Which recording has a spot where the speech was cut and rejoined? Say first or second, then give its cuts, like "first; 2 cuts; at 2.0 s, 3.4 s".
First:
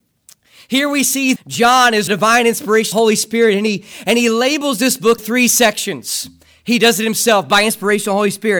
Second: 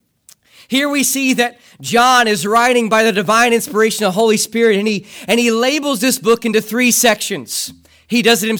first; 4 cuts; at 1.4 s, 2.1 s, 2.9 s, 5.2 s